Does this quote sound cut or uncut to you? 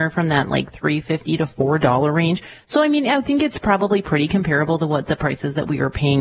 uncut